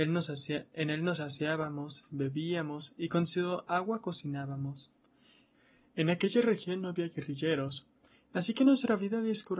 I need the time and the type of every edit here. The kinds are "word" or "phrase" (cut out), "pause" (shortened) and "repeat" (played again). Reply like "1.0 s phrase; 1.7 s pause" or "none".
none